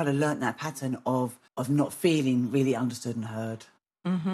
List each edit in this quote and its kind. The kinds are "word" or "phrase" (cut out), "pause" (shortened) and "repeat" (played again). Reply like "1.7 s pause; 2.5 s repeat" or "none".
1.5 s pause